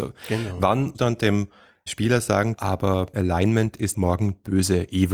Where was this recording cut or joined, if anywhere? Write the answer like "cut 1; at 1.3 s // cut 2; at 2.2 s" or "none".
cut 1; at 0.9 s // cut 2; at 1.9 s // cut 3; at 2.6 s // cut 4; at 3.1 s // cut 5; at 3.9 s

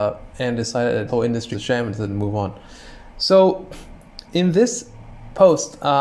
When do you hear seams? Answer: cut 1; at 1.1 s // cut 2; at 1.5 s // cut 3; at 4.2 s

